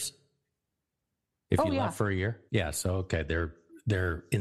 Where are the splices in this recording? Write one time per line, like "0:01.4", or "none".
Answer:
0:02.5